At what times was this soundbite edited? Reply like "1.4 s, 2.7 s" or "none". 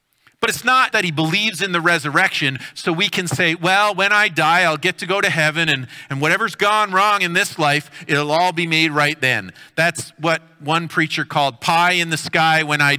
0.9 s